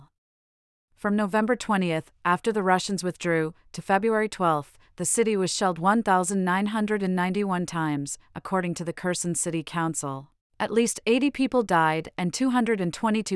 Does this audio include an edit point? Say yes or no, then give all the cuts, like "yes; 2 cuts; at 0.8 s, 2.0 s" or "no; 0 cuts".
yes; 1 cut; at 10.4 s